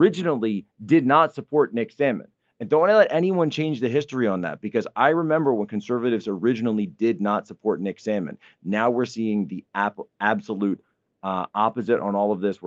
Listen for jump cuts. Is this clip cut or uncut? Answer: uncut